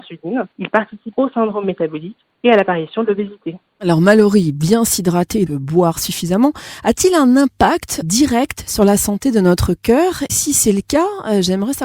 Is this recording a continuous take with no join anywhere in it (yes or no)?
no